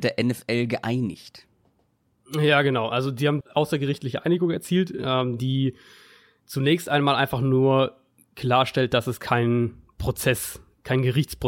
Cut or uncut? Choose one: cut